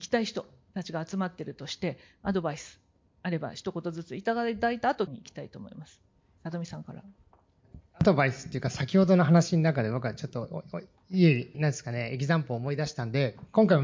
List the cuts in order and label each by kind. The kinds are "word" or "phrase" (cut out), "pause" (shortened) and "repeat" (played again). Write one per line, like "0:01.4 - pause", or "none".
0:05.1 - word
0:11.5 - word